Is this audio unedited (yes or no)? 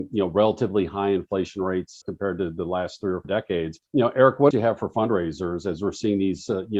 no